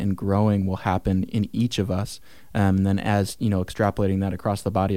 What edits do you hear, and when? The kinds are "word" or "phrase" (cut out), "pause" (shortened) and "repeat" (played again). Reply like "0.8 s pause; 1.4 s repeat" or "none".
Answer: none